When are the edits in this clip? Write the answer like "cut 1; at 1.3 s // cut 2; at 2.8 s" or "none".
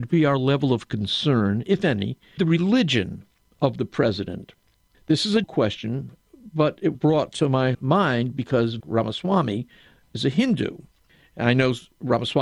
cut 1; at 2.4 s // cut 2; at 5.4 s // cut 3; at 6.9 s // cut 4; at 7.7 s // cut 5; at 8.8 s